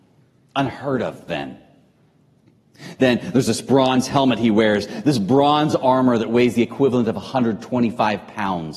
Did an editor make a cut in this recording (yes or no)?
no